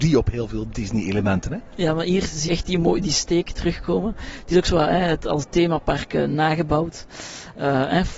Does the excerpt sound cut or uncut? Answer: cut